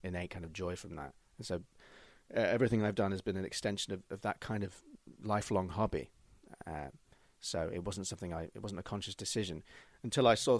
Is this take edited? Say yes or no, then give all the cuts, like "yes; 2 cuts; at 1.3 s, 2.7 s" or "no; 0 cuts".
no; 0 cuts